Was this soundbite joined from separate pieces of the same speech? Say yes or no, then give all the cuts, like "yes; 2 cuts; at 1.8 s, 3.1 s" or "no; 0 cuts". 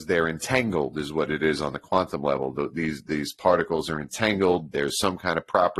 no; 0 cuts